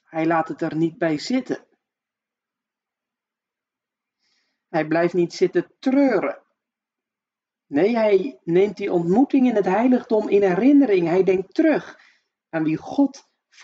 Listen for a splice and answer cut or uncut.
uncut